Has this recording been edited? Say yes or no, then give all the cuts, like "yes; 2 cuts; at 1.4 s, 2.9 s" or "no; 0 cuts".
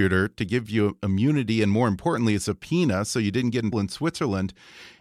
yes; 1 cut; at 3.7 s